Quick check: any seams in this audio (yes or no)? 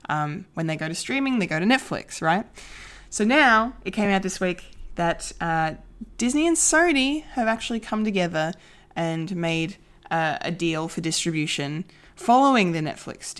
no